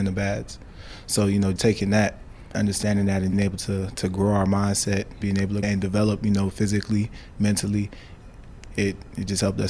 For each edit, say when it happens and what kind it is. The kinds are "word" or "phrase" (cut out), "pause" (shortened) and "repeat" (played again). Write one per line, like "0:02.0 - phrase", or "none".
0:01.6 - word
0:02.5 - word
0:03.3 - phrase
0:05.2 - word
0:05.6 - phrase

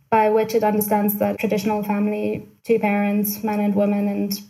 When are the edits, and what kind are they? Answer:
0:01.3 - phrase
0:02.6 - pause

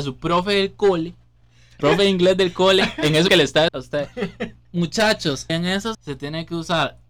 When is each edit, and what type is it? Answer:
0:01.8 - word
0:03.3 - word
0:03.7 - word
0:05.5 - word
0:05.9 - word

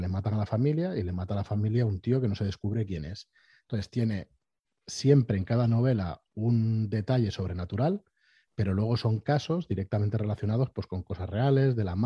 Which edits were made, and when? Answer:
none

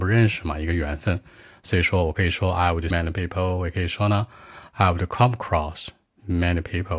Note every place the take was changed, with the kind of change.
0:02.9 - word

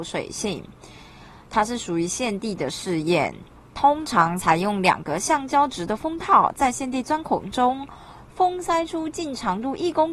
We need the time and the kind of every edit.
0:03.5 - pause

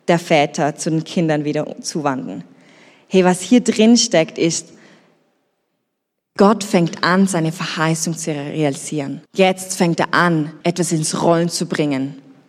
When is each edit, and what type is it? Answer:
0:09.3 - pause
0:10.6 - pause

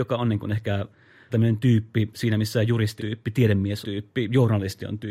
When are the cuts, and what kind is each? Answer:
0:01.3 - word
0:03.0 - word
0:03.8 - word

